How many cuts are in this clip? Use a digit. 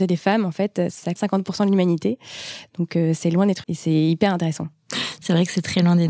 2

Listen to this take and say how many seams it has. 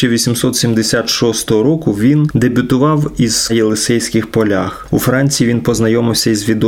1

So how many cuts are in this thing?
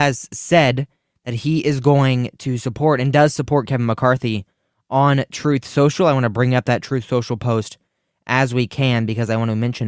0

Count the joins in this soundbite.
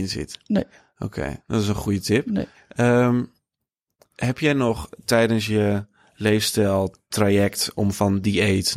0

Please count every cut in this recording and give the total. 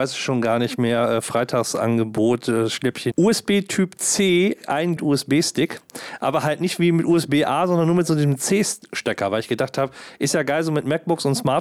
2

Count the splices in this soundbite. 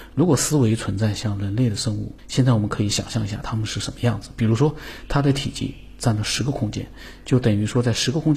1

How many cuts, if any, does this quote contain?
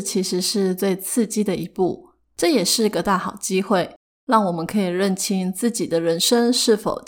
0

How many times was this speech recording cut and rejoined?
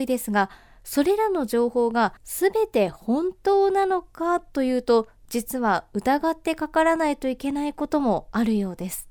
1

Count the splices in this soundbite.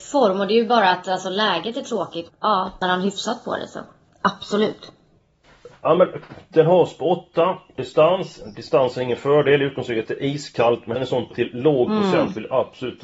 5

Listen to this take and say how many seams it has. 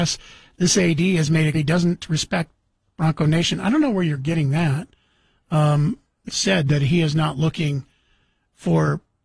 2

